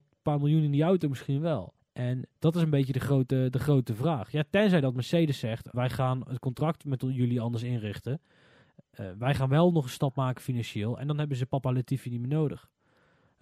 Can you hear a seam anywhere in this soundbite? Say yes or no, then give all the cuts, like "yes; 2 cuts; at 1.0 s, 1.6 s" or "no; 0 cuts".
yes; 2 cuts; at 1.8 s, 5.7 s